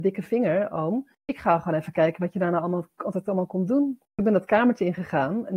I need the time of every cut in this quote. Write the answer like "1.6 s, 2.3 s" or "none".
4.0 s